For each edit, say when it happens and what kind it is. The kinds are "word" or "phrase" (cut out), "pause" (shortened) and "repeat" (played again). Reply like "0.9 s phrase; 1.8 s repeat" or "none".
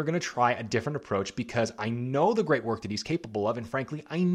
none